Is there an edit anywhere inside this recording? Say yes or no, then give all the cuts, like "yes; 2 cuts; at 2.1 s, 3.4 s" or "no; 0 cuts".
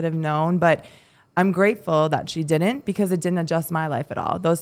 no; 0 cuts